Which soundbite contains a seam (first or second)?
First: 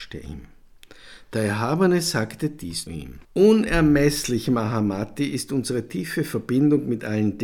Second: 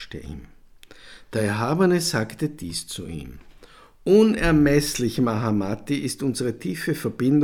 first